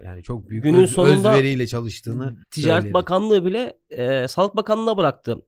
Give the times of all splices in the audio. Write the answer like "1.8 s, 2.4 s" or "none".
2.4 s